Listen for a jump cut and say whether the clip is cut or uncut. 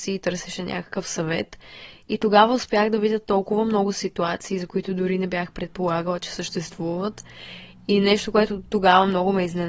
uncut